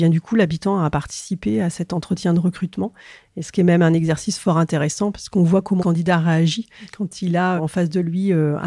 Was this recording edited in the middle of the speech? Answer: yes; 2 cuts; at 5.8 s, 7.6 s

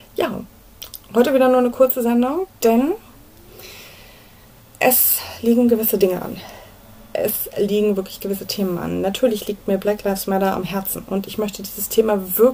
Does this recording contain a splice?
no; 0 cuts

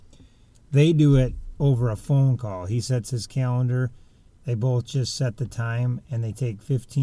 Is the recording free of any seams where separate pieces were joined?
yes; 0 cuts

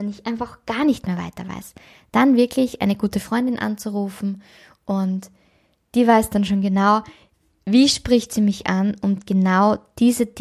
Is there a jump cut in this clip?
no; 0 cuts

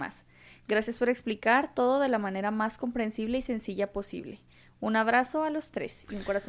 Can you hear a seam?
no; 0 cuts

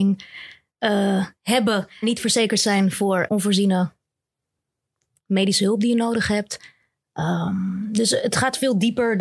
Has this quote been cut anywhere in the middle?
yes; 2 cuts; at 2.0 s, 3.3 s

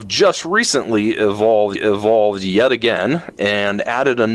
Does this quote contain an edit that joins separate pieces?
yes; 1 cut; at 1.8 s

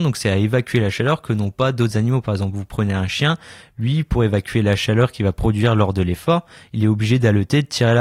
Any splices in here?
no; 0 cuts

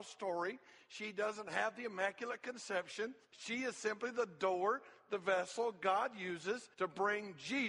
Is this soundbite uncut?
no; 2 cuts; at 3.2 s, 6.7 s

